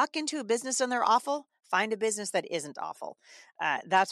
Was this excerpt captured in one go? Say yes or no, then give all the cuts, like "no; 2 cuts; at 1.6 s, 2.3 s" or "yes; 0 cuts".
yes; 0 cuts